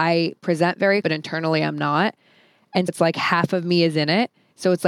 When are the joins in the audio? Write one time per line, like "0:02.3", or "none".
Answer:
0:01.0
0:02.9